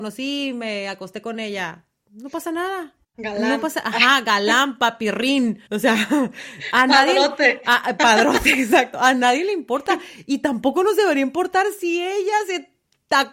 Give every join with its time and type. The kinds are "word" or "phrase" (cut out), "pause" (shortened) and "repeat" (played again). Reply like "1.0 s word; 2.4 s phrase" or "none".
3.0 s pause; 5.7 s pause